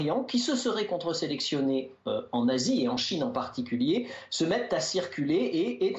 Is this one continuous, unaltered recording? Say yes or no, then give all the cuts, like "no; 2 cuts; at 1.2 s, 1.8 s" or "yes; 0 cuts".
yes; 0 cuts